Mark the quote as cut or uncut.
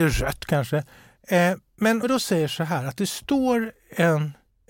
cut